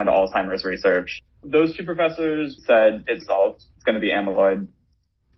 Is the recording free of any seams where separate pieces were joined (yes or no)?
no